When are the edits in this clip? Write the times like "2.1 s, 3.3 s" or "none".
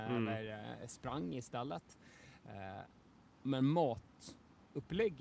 none